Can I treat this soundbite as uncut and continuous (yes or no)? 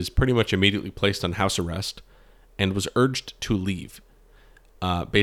yes